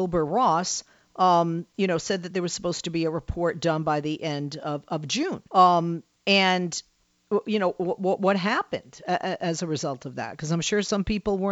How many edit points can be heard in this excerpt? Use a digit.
1